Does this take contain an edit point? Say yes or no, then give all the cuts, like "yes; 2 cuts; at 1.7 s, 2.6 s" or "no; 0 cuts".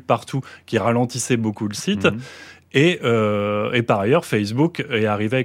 no; 0 cuts